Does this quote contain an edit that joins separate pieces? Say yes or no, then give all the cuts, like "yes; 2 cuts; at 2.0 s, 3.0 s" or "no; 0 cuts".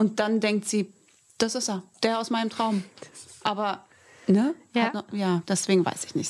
no; 0 cuts